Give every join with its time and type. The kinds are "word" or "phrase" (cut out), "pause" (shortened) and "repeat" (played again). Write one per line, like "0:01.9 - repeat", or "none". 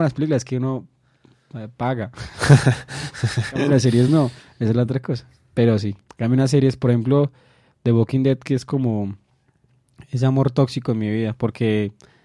none